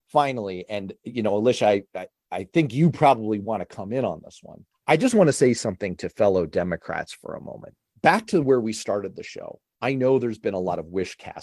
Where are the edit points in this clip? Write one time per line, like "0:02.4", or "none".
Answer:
none